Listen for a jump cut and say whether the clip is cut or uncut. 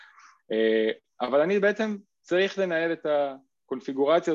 uncut